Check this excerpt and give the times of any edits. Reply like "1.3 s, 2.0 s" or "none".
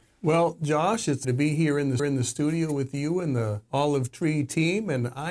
1.2 s, 2.0 s, 3.7 s